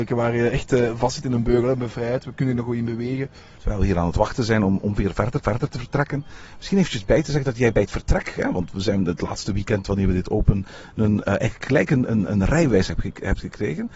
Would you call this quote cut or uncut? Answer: cut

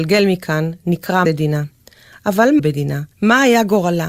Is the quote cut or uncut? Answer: cut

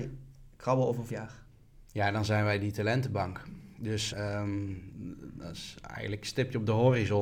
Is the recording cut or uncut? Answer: cut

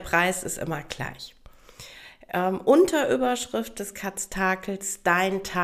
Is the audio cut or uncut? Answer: uncut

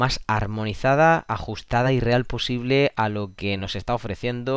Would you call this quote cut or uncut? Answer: uncut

